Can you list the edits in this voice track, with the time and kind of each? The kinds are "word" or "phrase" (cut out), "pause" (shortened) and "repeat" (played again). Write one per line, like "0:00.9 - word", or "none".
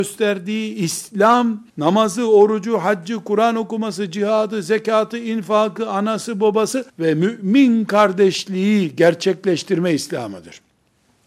0:01.7 - pause
0:06.9 - pause